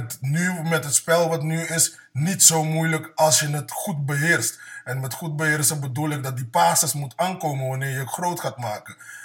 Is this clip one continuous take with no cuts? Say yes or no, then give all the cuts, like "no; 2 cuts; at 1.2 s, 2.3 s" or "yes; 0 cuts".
yes; 0 cuts